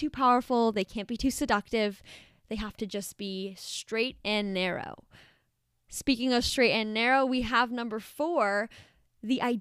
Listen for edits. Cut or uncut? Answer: uncut